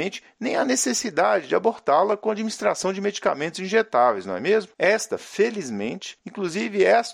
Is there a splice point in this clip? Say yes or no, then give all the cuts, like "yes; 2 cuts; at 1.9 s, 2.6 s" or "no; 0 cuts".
no; 0 cuts